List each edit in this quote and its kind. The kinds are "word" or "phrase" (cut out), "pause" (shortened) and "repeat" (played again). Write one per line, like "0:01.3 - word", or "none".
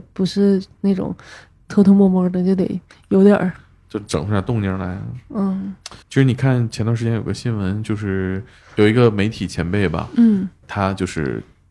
0:06.0 - pause
0:10.6 - word